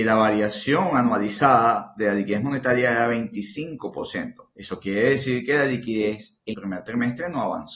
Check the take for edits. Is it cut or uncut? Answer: cut